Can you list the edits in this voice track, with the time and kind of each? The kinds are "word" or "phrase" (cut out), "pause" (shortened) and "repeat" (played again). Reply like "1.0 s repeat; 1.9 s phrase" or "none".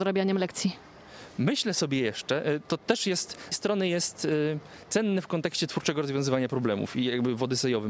3.5 s phrase